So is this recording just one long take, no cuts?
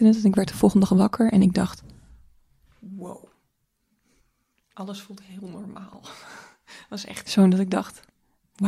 no; 1 cut; at 7.2 s

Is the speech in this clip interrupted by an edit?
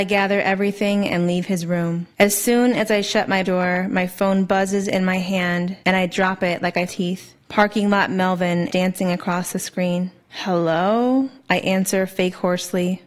yes; 7 cuts; at 2.1 s, 3.5 s, 5.8 s, 6.9 s, 7.4 s, 8.7 s, 10.2 s

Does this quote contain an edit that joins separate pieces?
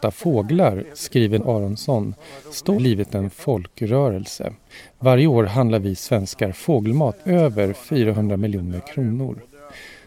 yes; 3 cuts; at 1.4 s, 2.7 s, 7.2 s

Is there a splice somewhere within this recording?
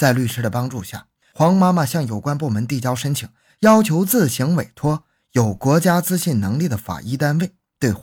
no; 0 cuts

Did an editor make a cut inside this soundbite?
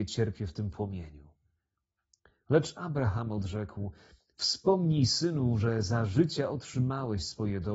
no; 0 cuts

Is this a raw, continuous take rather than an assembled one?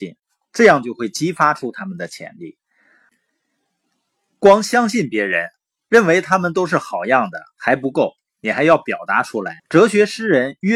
no; 1 cut; at 9.6 s

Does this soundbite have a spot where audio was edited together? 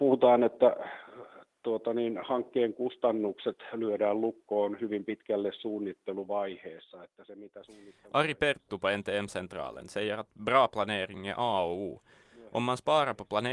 no; 0 cuts

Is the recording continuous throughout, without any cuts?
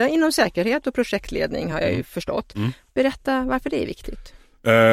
yes; 0 cuts

